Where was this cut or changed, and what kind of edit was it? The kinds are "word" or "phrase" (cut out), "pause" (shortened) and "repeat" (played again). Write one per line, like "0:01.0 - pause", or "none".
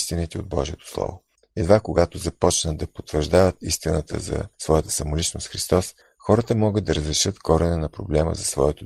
0:01.3 - pause
0:04.5 - pause
0:06.0 - pause